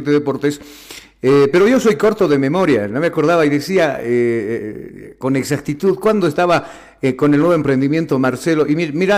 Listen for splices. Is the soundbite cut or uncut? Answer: uncut